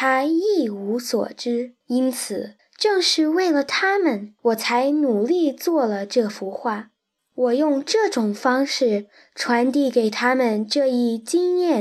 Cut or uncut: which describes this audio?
cut